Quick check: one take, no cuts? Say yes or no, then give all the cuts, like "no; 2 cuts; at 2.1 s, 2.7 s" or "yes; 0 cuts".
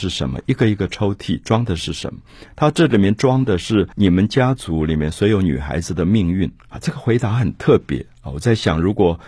no; 2 cuts; at 3.9 s, 6.6 s